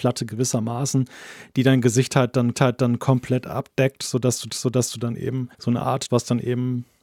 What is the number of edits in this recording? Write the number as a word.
four